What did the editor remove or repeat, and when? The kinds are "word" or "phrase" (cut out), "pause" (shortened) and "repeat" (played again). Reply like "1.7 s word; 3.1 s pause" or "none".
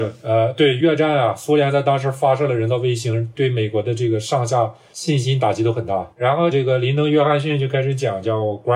6.1 s pause